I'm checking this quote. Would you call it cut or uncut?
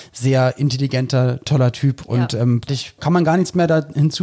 cut